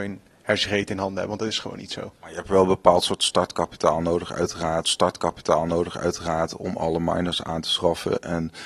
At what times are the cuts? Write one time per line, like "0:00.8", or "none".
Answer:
0:02.2
0:04.8